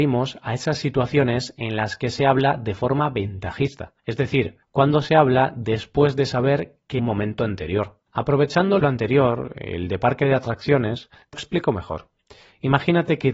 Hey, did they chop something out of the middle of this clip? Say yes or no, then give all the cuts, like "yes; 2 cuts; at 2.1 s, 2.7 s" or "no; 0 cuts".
yes; 6 cuts; at 4.0 s, 4.6 s, 7.0 s, 8.1 s, 8.8 s, 11.3 s